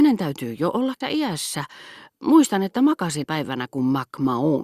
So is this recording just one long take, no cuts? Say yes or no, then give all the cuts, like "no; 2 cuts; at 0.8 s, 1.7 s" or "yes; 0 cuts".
no; 2 cuts; at 1.0 s, 3.2 s